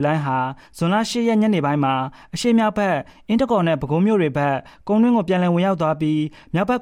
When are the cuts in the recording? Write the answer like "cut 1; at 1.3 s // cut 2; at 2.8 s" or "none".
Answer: none